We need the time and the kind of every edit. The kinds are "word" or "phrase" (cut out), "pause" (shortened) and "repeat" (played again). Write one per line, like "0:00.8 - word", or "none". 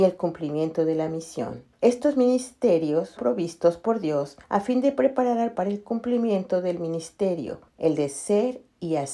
0:01.7 - pause
0:03.2 - word
0:04.4 - pause
0:05.5 - word
0:07.7 - pause